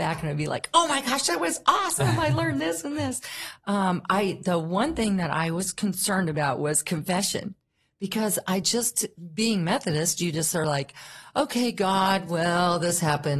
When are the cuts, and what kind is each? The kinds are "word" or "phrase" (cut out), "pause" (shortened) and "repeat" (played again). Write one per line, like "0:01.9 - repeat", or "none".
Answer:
none

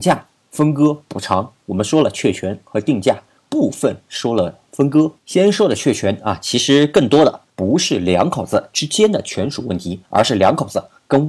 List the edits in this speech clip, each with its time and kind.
0:05.2 - pause
0:07.5 - pause
0:10.1 - pause

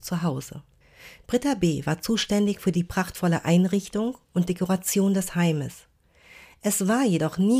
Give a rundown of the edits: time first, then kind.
none

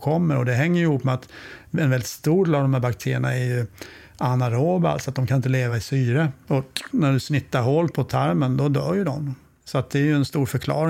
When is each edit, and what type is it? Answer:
none

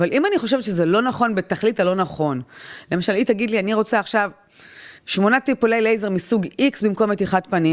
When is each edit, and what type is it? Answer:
0:05.0 - pause

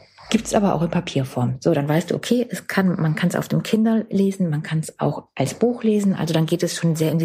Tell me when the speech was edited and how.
none

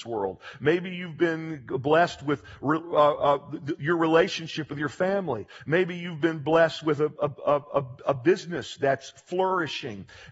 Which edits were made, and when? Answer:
none

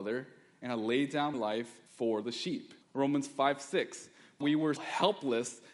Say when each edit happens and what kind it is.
0:01.3 - word
0:01.9 - pause
0:02.8 - pause
0:04.4 - word
0:04.8 - word

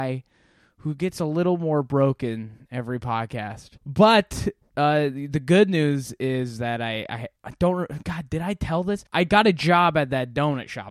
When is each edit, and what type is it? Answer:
0:03.8 - pause
0:07.4 - pause
0:09.1 - pause

